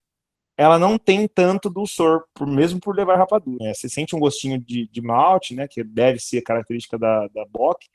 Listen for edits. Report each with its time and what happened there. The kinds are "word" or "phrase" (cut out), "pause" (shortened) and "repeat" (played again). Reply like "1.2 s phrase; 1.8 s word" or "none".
2.3 s pause; 3.6 s word